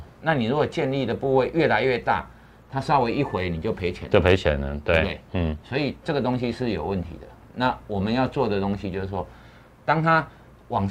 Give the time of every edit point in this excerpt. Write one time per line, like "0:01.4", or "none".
none

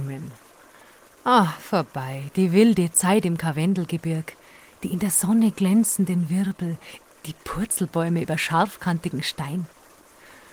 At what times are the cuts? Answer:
none

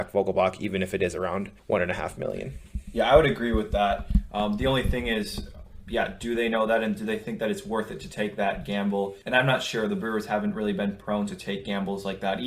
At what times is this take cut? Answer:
0:01.6
0:09.2

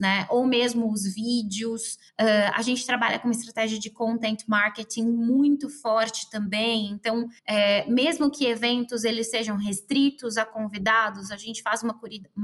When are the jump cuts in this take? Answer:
0:02.1
0:07.4

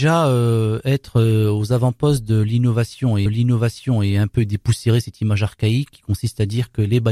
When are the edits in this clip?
0:03.3

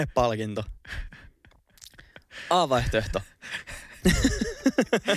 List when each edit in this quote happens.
none

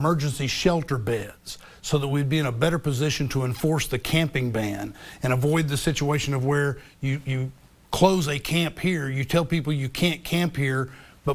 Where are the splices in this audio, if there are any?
none

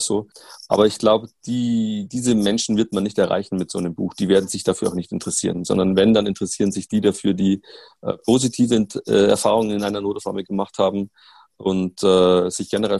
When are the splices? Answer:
none

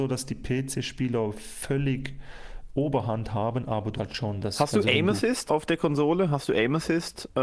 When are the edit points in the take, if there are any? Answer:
0:04.0
0:05.5

